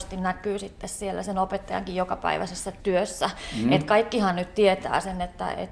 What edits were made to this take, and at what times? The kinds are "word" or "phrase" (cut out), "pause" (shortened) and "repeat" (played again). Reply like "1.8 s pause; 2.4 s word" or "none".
none